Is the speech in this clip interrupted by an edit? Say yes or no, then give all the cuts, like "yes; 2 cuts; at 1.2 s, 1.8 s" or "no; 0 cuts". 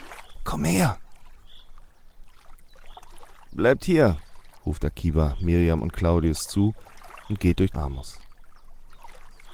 yes; 1 cut; at 7.7 s